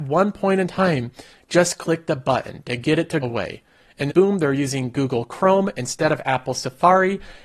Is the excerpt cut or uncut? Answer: cut